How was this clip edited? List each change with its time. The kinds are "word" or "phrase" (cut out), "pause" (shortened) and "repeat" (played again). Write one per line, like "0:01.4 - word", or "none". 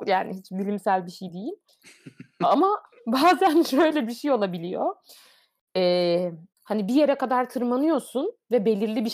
0:01.7 - pause
0:06.5 - pause